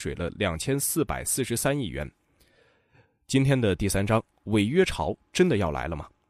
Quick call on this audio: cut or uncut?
uncut